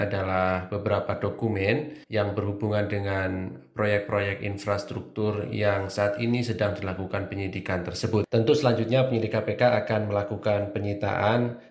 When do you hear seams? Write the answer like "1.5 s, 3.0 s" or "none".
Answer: 2.0 s